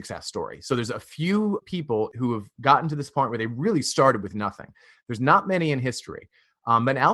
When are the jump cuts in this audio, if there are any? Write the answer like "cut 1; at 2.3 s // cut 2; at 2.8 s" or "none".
none